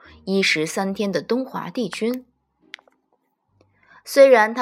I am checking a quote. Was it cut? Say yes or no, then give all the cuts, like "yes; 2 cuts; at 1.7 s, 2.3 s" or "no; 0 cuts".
no; 0 cuts